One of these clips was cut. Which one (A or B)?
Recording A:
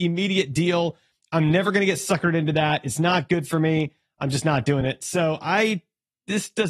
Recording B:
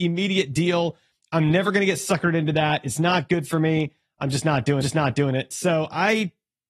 B